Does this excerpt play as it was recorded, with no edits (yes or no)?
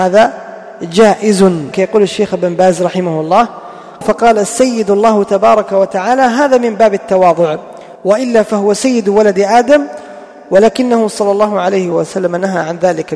no